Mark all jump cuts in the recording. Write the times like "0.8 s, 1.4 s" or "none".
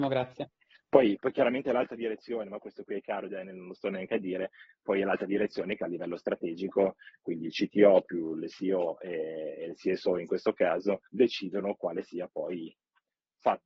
11.0 s